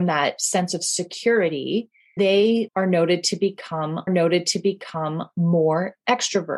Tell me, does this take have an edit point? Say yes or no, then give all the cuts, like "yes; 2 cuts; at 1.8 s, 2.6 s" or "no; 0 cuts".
yes; 3 cuts; at 2.2 s, 2.7 s, 4.1 s